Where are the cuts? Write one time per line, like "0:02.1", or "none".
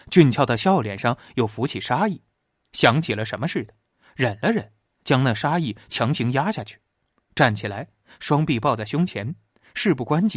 none